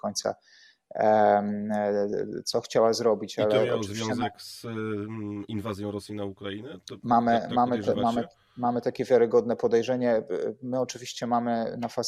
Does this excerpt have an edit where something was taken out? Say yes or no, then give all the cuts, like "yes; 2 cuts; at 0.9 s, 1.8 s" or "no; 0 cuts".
no; 0 cuts